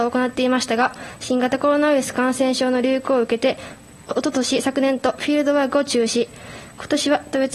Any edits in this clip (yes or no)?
no